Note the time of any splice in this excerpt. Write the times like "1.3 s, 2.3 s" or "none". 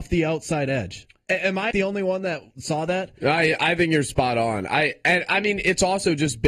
1.7 s